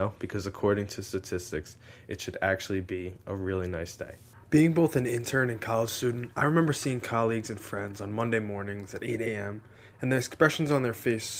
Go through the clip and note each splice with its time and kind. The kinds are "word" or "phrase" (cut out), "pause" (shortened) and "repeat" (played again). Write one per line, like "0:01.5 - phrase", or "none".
none